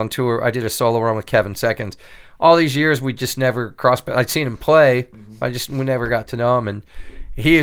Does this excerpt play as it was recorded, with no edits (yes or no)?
yes